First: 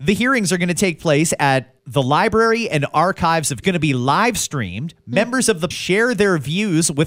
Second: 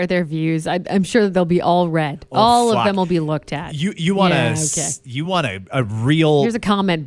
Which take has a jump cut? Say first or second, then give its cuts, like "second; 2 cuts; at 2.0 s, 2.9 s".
first; 3 cuts; at 1.8 s, 3.6 s, 5.7 s